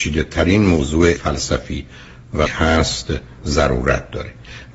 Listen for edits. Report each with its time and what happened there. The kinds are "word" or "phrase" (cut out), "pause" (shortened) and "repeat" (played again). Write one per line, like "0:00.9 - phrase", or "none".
0:01.2 - word
0:02.5 - word